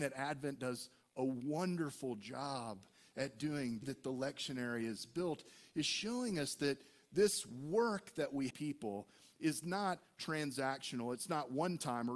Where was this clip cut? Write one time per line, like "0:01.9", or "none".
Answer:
0:03.8
0:08.5